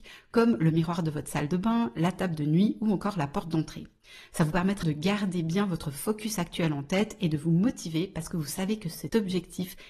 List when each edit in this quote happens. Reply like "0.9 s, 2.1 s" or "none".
4.8 s